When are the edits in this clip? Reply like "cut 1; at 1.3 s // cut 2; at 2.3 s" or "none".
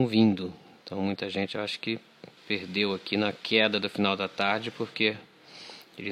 cut 1; at 2.4 s

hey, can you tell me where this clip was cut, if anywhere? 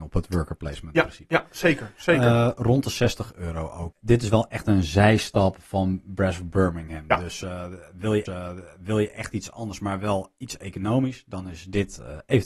cut 1; at 8.3 s

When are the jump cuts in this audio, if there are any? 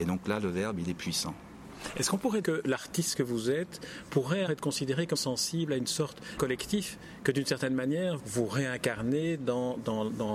cut 1; at 2.4 s // cut 2; at 4.5 s // cut 3; at 5.1 s // cut 4; at 6.4 s // cut 5; at 8.2 s

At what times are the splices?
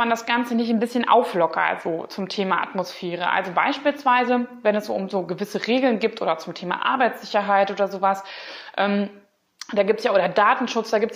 none

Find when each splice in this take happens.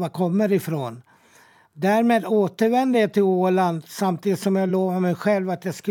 none

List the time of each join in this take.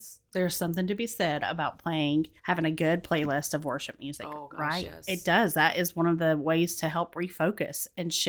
cut 1; at 2.4 s

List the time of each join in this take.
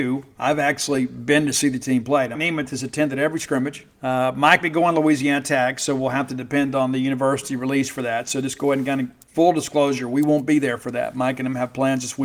cut 1; at 2.3 s // cut 2; at 3.9 s // cut 3; at 4.6 s

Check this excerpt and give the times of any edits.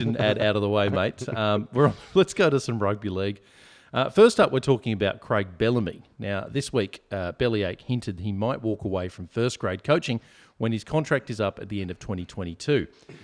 none

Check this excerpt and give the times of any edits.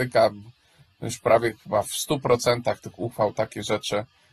cut 1; at 1.6 s

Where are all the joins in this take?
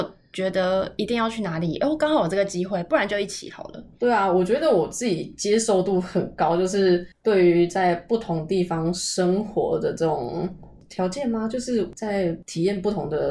cut 1; at 7.1 s

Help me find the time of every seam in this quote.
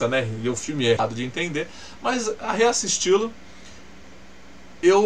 cut 1; at 1.0 s

